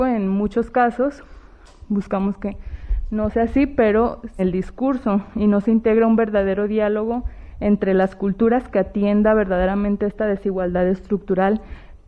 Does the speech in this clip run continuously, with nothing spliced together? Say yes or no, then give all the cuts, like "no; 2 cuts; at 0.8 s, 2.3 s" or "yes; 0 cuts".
no; 1 cut; at 4.4 s